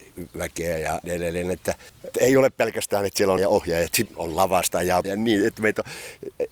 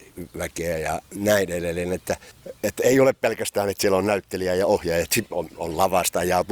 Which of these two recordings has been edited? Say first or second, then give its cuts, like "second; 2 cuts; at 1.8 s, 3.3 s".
first; 5 cuts; at 1.0 s, 2.1 s, 3.4 s, 4.1 s, 5.0 s